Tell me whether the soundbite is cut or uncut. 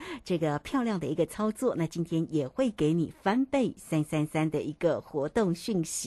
uncut